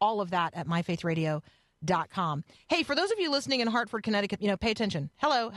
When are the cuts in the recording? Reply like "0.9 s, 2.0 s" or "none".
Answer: 4.4 s